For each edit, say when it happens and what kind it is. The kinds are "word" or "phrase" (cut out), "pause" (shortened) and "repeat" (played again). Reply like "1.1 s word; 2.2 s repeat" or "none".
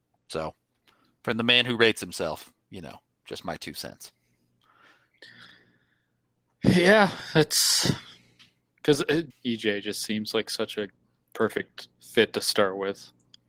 9.3 s word